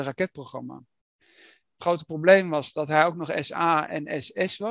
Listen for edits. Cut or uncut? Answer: uncut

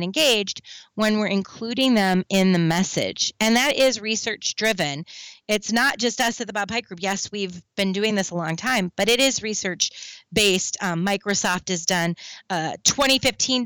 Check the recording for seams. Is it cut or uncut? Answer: uncut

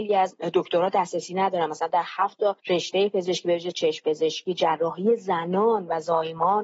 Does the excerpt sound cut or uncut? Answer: uncut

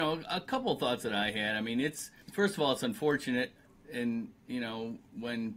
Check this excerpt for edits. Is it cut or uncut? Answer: uncut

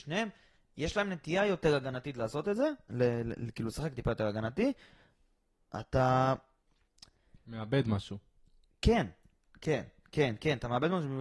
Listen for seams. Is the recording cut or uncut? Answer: uncut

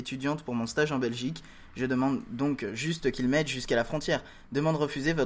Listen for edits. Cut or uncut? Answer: uncut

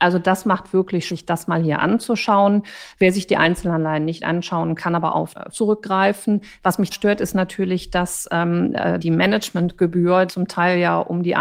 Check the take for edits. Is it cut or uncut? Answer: cut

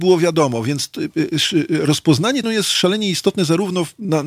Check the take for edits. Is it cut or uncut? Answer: cut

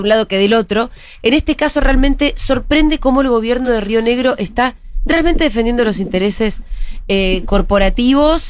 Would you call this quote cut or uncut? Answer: uncut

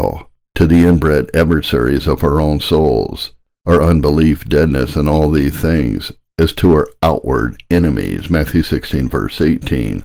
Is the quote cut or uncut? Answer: uncut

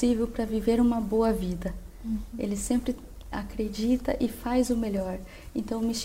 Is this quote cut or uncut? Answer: uncut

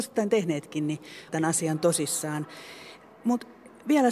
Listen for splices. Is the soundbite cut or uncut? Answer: cut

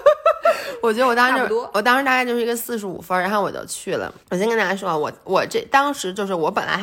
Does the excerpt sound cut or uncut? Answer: cut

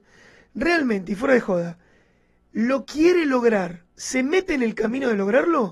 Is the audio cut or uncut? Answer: cut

